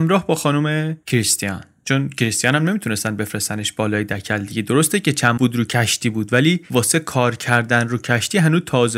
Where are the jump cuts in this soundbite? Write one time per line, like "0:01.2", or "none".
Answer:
0:05.4
0:06.6